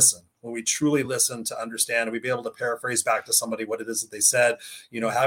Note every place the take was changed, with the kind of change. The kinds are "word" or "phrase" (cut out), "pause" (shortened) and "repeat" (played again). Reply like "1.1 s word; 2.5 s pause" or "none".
none